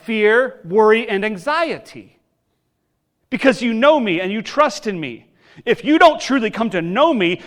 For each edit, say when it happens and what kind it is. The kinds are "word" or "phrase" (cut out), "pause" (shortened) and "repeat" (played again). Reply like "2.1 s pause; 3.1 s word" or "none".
none